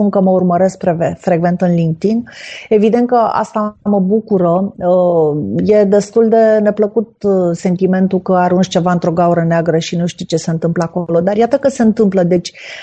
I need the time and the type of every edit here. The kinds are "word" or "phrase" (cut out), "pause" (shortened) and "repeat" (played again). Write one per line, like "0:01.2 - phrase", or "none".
none

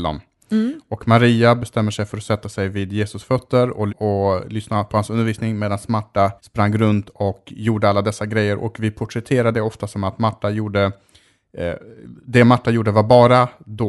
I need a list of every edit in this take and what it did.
0:03.9 - phrase
0:06.4 - pause

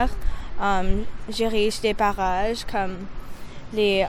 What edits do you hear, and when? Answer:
none

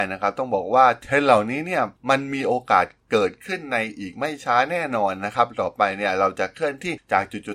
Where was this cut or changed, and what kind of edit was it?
0:02.0 - pause

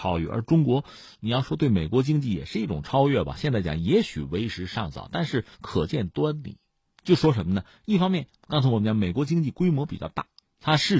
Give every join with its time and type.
0:05.5 - pause
0:08.4 - pause

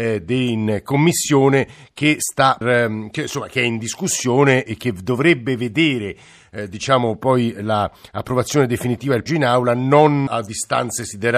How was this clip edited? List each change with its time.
0:02.6 - word
0:04.7 - word
0:09.3 - word
0:10.3 - word

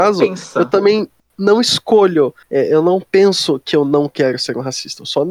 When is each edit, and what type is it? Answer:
0:02.4 - pause

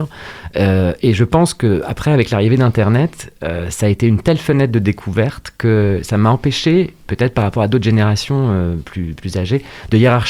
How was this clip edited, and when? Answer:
none

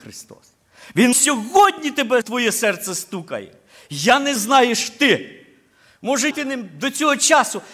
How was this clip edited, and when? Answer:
0:01.1 - word
0:02.2 - word
0:04.4 - word
0:06.3 - word

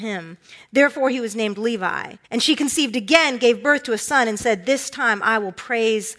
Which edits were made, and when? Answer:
0:02.2 - pause

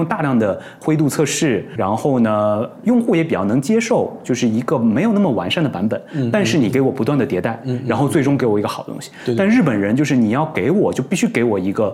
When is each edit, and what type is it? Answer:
0:01.8 - word

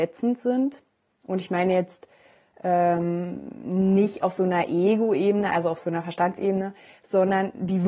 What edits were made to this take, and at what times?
none

